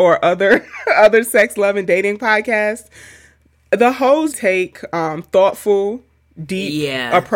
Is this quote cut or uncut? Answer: cut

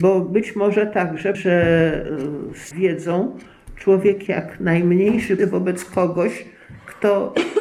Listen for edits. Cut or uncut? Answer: cut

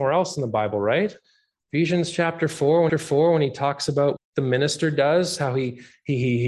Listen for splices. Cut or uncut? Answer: cut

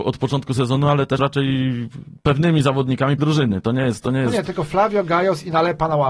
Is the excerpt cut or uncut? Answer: cut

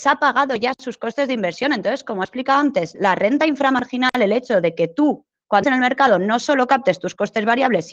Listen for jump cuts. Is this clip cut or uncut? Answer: cut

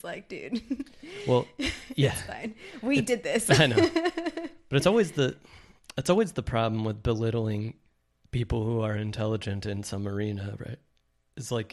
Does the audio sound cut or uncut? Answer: uncut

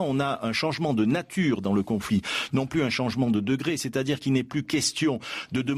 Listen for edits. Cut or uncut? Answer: uncut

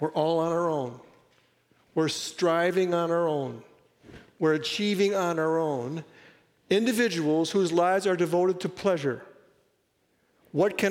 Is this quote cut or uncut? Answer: uncut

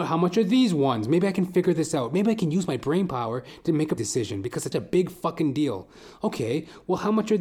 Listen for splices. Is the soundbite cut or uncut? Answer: cut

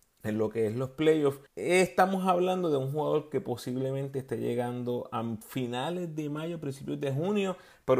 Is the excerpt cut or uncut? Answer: cut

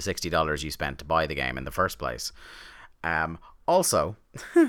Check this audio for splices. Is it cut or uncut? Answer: uncut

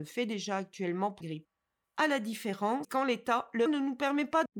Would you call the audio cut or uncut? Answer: cut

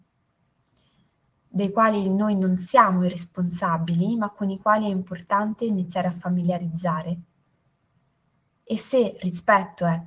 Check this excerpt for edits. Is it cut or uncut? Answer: uncut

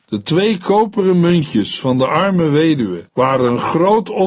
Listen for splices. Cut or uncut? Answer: cut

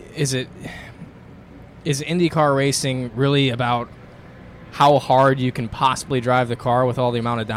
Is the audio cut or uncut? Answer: uncut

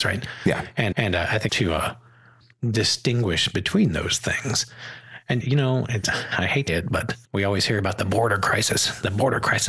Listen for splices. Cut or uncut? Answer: cut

